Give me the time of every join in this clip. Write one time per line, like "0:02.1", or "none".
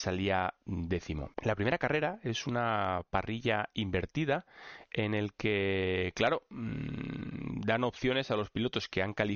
0:01.3